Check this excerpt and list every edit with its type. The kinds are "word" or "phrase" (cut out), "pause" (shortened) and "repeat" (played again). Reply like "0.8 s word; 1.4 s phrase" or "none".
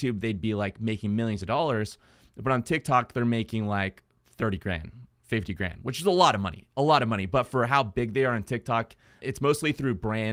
9.2 s word